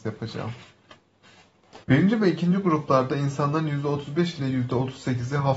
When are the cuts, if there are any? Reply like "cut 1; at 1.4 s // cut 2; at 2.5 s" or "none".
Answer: cut 1; at 1.8 s